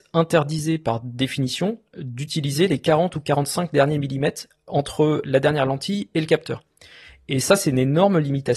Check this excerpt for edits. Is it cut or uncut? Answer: uncut